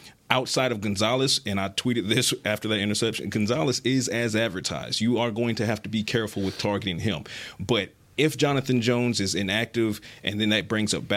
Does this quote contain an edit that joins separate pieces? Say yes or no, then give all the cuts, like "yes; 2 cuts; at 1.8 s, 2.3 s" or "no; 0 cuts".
no; 0 cuts